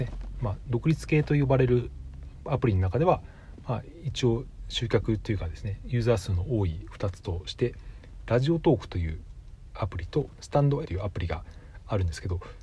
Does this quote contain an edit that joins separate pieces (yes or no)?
yes